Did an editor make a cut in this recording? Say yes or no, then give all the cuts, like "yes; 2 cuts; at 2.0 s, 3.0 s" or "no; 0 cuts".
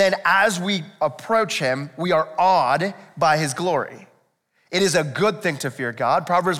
no; 0 cuts